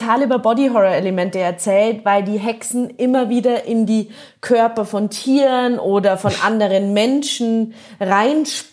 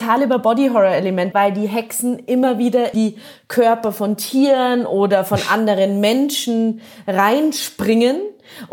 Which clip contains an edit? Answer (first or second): second